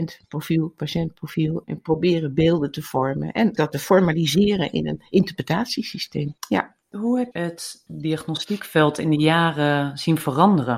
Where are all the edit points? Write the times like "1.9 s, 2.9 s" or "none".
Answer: 1.6 s, 3.6 s, 6.4 s, 7.3 s